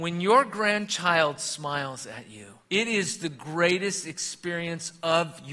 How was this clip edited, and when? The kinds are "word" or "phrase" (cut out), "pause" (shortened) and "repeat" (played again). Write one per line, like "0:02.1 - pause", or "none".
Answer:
0:02.6 - pause